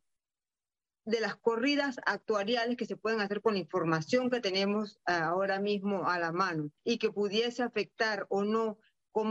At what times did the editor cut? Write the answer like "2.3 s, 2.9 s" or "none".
6.8 s